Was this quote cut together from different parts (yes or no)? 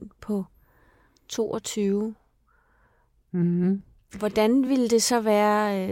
no